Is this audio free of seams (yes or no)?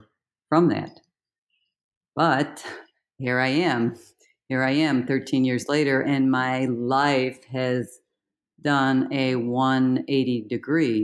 yes